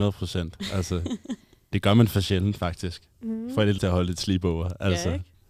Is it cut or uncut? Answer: cut